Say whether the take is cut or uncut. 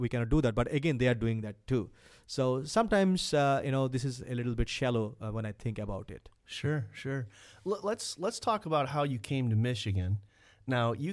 uncut